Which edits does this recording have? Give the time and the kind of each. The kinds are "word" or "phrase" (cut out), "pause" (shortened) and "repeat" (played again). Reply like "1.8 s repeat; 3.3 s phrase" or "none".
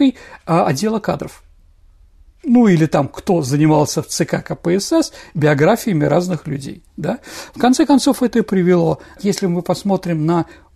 none